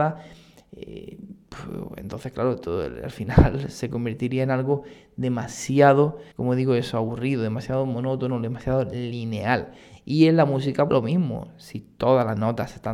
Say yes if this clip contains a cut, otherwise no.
yes